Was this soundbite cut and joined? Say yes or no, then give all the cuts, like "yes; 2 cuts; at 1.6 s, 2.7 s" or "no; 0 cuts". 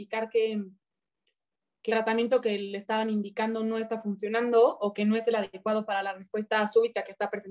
yes; 1 cut; at 1.9 s